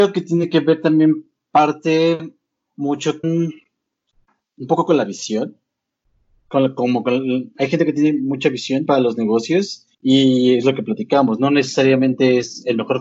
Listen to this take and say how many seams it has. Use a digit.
3